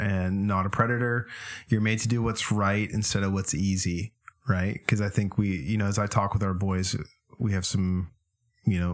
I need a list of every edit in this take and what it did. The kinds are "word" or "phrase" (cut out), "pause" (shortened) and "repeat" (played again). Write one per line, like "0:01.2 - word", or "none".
none